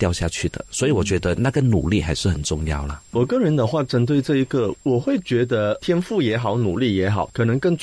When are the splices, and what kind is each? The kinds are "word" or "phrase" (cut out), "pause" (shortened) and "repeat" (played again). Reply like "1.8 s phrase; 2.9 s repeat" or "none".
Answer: none